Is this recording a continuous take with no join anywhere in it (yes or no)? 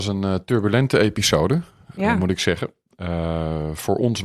yes